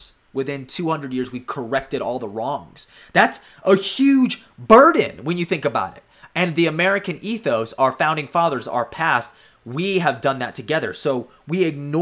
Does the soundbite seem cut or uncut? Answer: uncut